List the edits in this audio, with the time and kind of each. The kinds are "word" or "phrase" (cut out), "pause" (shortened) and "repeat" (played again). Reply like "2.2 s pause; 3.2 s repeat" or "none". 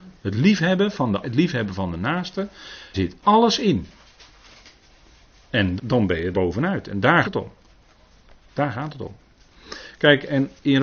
1.2 s word; 2.9 s word; 5.8 s word; 6.3 s word; 7.2 s word